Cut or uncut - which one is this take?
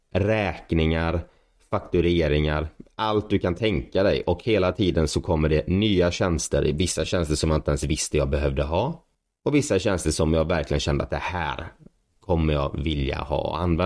uncut